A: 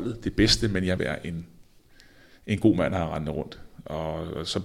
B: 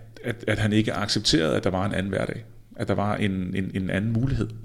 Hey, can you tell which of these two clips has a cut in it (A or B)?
A